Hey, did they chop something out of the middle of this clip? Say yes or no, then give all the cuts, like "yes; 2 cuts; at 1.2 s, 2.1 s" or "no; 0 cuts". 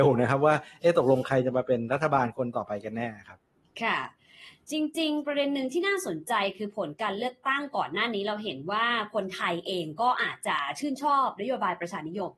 no; 0 cuts